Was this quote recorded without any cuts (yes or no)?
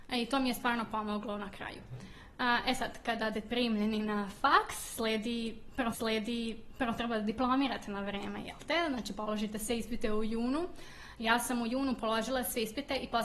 no